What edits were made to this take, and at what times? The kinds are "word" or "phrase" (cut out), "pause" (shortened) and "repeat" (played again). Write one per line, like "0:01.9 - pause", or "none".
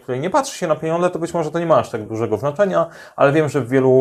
0:02.1 - word